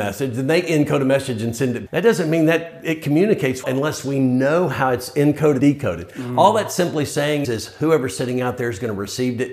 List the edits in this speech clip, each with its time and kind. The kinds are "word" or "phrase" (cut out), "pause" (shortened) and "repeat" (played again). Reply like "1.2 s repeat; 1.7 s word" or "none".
1.9 s word; 3.6 s word; 5.6 s word; 7.4 s word